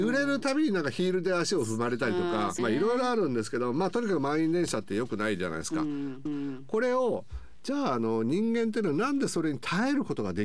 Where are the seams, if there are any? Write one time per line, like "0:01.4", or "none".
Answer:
0:02.6
0:06.3